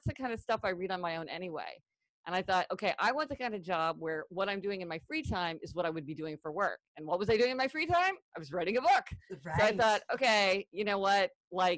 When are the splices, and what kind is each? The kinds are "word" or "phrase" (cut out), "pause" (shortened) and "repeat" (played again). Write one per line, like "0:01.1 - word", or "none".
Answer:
none